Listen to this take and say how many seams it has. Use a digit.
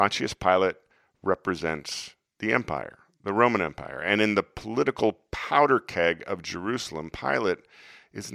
0